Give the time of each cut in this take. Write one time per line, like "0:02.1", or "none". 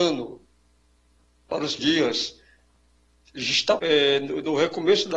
0:01.8
0:03.8